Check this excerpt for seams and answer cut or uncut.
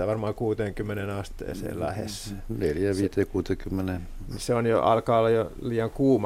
uncut